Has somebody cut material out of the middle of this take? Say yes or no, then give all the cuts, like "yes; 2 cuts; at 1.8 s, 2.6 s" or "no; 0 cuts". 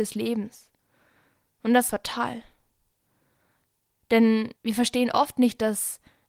yes; 2 cuts; at 1.9 s, 4.6 s